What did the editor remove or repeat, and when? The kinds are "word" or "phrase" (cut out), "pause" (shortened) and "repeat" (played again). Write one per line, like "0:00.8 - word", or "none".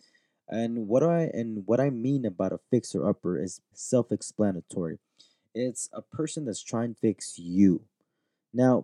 0:03.7 - word
0:06.9 - word

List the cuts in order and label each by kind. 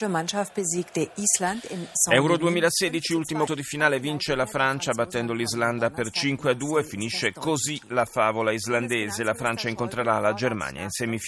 0:03.5 - word

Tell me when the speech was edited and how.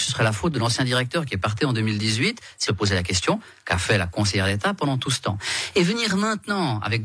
0:02.7 - word

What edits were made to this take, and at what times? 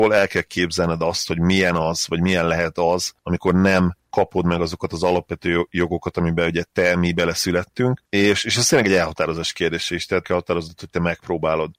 0:10.2 - phrase

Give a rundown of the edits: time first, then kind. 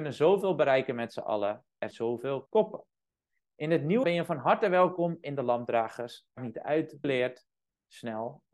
0:01.9 - word
0:02.5 - word
0:04.0 - word
0:06.4 - word
0:07.0 - phrase

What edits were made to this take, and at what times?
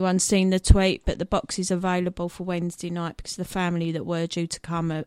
none

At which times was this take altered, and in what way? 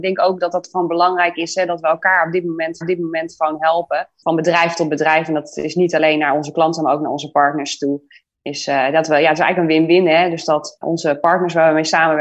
0:02.8 - repeat
0:10.8 - word

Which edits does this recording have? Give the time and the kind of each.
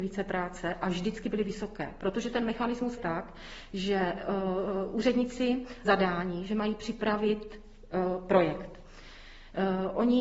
0:03.0 - word
0:05.8 - phrase

